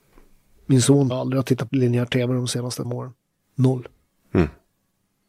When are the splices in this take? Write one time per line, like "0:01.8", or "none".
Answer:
0:01.1
0:01.7
0:02.8
0:03.2